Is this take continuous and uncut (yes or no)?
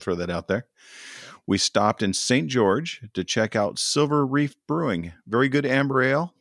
yes